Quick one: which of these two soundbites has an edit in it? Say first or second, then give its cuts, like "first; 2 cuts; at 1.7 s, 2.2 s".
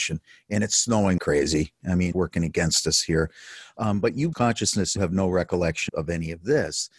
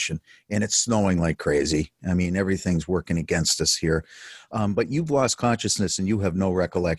first; 5 cuts; at 1.2 s, 2.1 s, 4.3 s, 5.0 s, 5.9 s